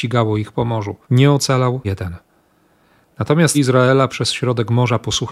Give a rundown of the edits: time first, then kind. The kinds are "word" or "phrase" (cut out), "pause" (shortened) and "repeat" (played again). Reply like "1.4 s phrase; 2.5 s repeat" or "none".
1.0 s pause; 1.8 s word; 3.5 s word; 4.1 s word